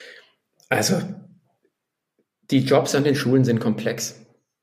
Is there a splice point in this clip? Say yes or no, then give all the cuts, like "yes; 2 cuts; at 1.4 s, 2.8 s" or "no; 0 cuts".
no; 0 cuts